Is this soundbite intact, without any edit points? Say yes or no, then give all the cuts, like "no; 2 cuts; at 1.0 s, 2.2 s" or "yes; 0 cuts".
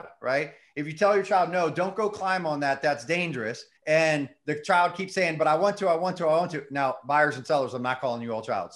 no; 1 cut; at 3.8 s